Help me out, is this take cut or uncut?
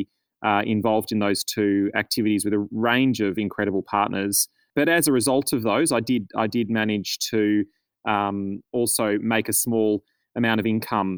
uncut